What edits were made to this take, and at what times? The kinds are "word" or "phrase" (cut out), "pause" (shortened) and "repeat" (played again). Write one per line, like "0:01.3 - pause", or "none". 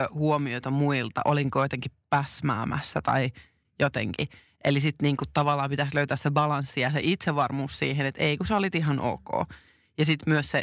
none